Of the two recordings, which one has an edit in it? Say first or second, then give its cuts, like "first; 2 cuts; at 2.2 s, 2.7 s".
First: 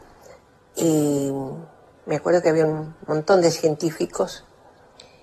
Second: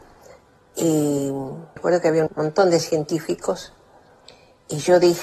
second; 2 cuts; at 1.8 s, 2.3 s